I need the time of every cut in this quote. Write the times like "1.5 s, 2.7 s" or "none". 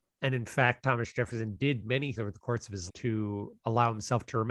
2.2 s, 2.9 s, 3.6 s